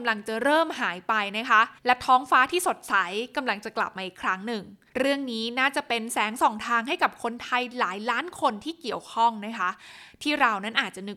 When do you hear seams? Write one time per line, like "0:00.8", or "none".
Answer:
0:01.8
0:04.9